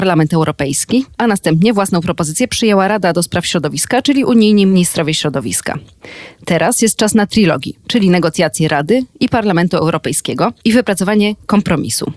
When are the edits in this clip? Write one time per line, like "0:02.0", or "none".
none

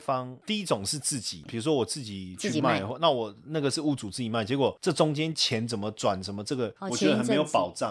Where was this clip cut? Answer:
0:01.5

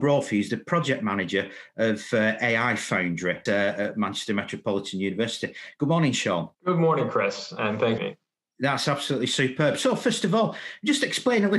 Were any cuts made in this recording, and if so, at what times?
0:03.5
0:06.5
0:08.0

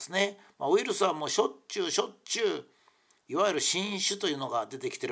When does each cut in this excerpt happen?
none

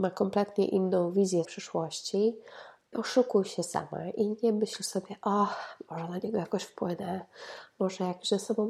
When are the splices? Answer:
0:01.4
0:02.9

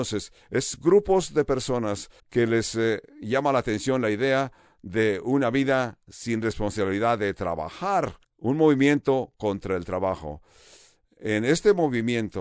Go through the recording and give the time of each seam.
0:02.2
0:08.2

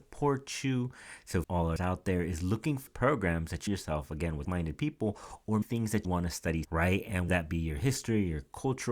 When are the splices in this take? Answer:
0:01.4
0:01.8
0:02.9
0:03.7
0:04.4
0:05.6
0:06.0
0:06.6
0:07.3

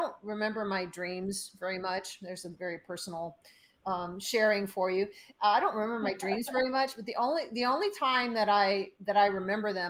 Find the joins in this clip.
none

